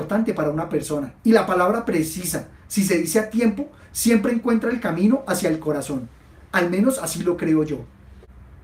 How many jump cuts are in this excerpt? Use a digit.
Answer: 1